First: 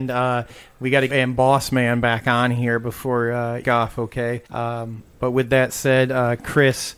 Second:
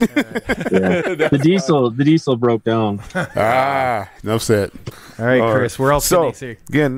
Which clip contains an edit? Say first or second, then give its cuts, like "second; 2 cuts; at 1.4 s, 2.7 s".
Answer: first; 3 cuts; at 1.1 s, 3.6 s, 4.5 s